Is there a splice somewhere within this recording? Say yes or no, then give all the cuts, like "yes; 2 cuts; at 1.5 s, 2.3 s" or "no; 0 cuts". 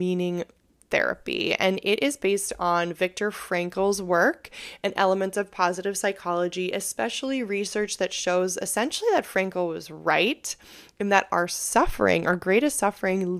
no; 0 cuts